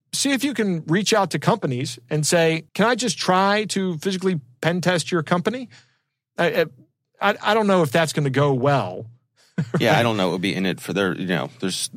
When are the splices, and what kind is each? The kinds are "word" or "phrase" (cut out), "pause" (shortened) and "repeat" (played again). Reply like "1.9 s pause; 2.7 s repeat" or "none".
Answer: 2.7 s pause